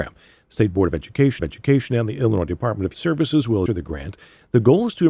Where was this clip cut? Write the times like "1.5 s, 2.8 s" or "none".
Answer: 1.4 s, 2.9 s, 3.7 s